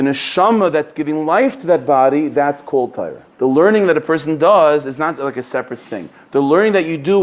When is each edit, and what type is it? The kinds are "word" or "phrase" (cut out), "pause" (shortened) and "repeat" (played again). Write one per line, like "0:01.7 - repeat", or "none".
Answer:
0:03.3 - pause